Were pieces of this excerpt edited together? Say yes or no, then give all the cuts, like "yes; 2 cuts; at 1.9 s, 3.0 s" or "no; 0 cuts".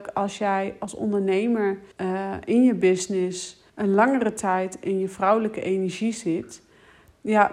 yes; 2 cuts; at 1.9 s, 3.7 s